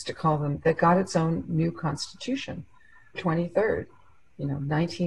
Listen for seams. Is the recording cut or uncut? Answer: cut